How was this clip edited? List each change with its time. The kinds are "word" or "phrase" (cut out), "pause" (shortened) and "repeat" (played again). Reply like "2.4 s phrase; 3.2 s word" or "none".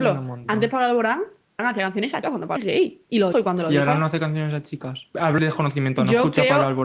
1.6 s word; 2.2 s word; 2.6 s word; 3.3 s word; 5.4 s word